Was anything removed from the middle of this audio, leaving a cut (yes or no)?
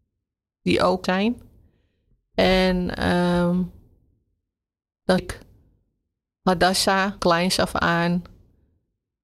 yes